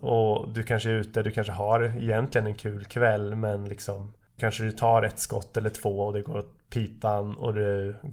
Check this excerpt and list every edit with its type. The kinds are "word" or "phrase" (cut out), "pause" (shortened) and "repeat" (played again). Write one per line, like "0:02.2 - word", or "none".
0:04.4 - word